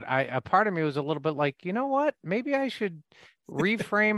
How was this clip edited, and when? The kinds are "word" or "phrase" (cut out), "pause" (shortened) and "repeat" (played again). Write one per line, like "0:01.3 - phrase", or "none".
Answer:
none